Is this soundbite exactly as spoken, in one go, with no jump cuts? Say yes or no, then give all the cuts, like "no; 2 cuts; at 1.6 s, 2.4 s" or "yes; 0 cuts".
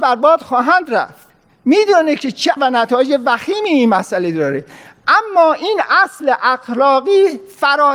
no; 1 cut; at 2.6 s